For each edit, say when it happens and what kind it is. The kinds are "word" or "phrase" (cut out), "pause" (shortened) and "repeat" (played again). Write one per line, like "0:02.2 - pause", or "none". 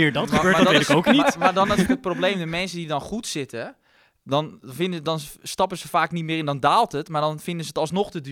0:01.9 - word